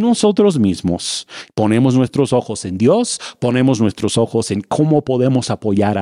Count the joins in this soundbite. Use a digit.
0